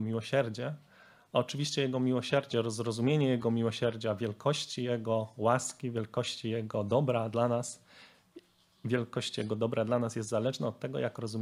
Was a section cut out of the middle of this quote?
no; 0 cuts

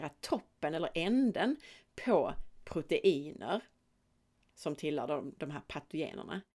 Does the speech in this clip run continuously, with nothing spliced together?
yes; 0 cuts

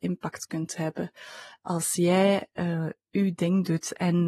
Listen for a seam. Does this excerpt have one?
no; 0 cuts

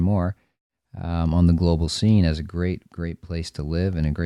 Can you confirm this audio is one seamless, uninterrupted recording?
yes; 0 cuts

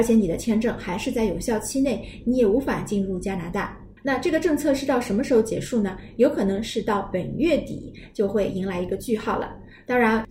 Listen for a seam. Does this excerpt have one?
yes; 1 cut; at 4.0 s

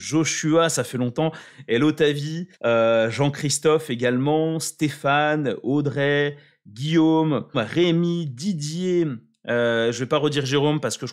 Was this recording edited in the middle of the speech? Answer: yes; 2 cuts; at 2.5 s, 7.5 s

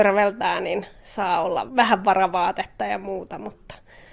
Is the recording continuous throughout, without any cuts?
no; 1 cut; at 1.7 s

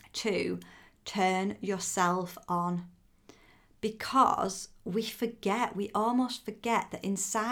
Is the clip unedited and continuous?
yes; 0 cuts

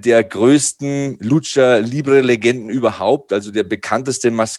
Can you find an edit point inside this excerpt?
no; 0 cuts

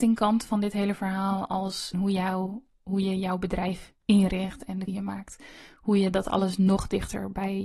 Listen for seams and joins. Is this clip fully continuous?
no; 3 cuts; at 1.9 s, 4.0 s, 4.9 s

